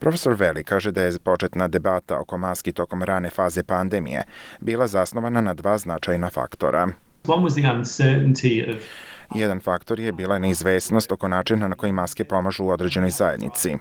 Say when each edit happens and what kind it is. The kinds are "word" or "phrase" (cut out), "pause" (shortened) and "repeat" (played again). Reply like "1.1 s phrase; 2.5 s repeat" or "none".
none